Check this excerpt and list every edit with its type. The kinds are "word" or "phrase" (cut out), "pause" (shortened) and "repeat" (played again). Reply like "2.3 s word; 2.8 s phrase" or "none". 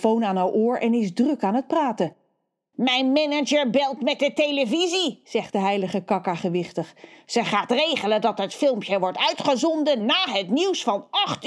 none